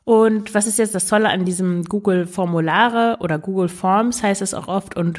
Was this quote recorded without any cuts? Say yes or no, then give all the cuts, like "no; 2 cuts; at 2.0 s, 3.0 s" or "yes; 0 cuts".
yes; 0 cuts